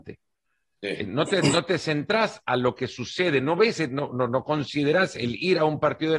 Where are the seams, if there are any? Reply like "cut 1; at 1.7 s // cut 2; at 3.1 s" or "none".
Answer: none